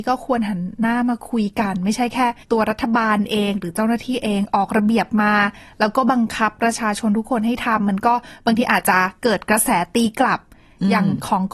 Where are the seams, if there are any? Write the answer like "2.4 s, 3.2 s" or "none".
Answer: 2.4 s